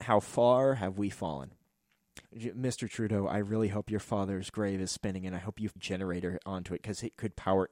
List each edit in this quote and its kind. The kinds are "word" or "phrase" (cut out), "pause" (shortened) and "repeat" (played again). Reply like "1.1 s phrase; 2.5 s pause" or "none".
2.2 s pause; 5.8 s phrase